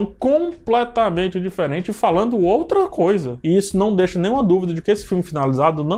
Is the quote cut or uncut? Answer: uncut